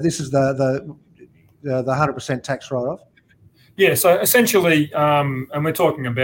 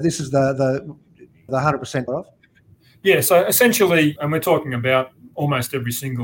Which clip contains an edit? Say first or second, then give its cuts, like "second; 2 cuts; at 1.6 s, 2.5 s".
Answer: second; 3 cuts; at 1.5 s, 2.1 s, 4.2 s